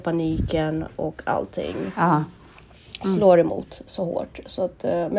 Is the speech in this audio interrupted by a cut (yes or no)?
no